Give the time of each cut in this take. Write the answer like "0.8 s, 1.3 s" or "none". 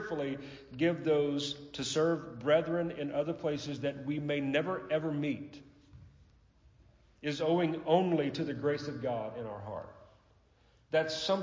none